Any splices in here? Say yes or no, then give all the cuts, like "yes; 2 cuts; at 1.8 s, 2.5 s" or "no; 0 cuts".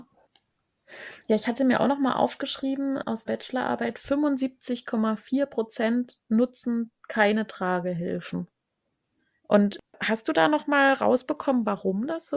yes; 1 cut; at 3.3 s